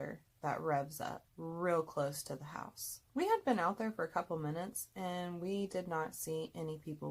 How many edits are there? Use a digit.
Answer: 2